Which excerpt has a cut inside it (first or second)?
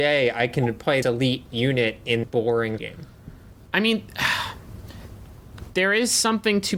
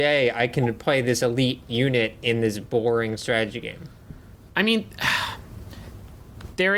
first